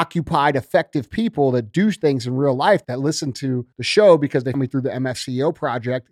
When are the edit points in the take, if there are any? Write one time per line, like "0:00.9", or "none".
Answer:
0:02.8
0:03.7
0:04.5